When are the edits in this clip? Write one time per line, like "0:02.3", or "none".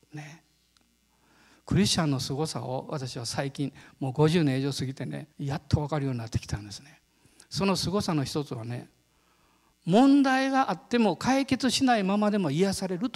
0:05.3